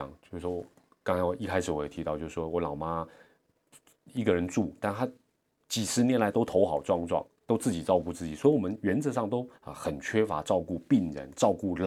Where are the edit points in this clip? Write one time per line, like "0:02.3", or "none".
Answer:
0:09.6